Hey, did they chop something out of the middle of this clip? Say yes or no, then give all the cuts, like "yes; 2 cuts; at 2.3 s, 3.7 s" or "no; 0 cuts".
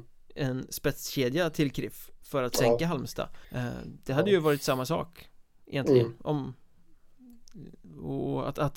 yes; 1 cut; at 3.4 s